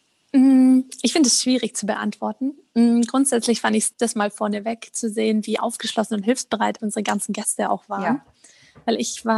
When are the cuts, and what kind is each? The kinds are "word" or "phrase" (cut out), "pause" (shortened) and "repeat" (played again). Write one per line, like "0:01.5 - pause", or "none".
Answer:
0:03.9 - word
0:06.8 - word